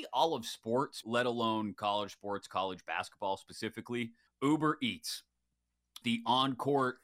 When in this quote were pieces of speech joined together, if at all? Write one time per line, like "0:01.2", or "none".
0:01.0
0:04.3
0:06.0